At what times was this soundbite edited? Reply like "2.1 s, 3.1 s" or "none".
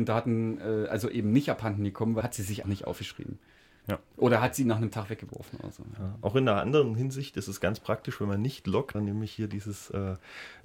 2.2 s, 2.6 s, 8.9 s